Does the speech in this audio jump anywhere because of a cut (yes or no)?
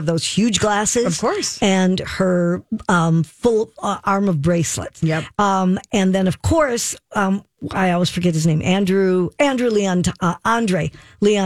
no